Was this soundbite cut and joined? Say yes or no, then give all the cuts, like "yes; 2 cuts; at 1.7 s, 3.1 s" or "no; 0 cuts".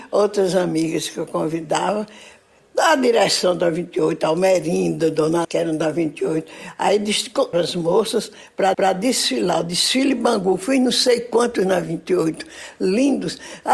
yes; 4 cuts; at 2.6 s, 5.4 s, 7.5 s, 8.7 s